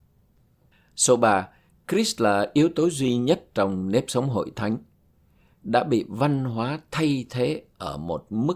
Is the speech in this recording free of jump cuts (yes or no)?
yes